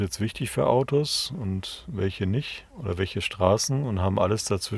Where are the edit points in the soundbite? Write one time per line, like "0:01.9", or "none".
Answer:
0:02.7